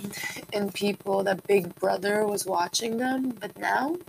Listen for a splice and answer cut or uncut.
uncut